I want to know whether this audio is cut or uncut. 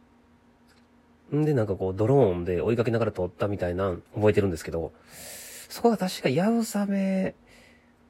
cut